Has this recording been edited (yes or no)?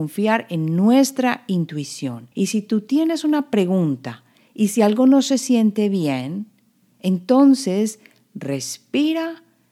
yes